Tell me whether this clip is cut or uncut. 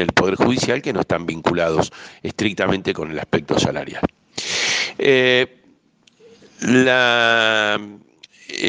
uncut